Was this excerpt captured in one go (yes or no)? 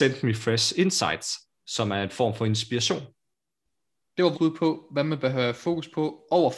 no